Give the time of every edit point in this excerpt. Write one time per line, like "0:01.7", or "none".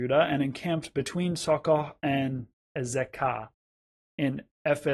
none